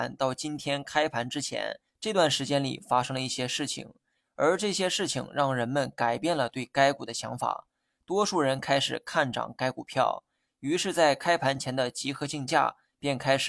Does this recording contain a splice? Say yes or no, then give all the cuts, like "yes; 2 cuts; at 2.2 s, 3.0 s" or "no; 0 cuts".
yes; 1 cut; at 1.9 s